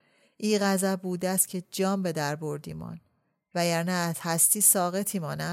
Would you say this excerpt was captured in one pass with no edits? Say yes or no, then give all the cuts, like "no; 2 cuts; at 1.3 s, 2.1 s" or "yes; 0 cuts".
yes; 0 cuts